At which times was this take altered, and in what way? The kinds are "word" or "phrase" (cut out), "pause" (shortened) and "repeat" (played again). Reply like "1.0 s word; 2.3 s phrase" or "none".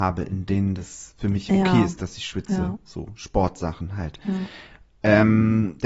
none